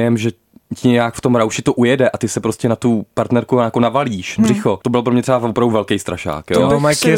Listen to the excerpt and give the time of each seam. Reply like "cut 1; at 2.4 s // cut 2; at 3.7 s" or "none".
cut 1; at 4.4 s

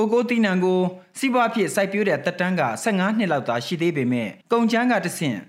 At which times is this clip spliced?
cut 1; at 4.4 s

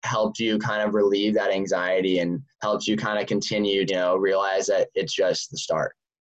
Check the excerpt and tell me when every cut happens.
cut 1; at 2.5 s // cut 2; at 3.9 s

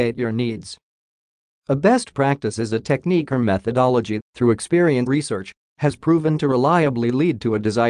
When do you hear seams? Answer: cut 1; at 4.2 s // cut 2; at 5.1 s

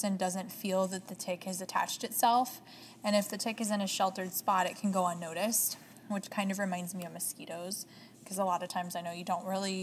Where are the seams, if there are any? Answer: none

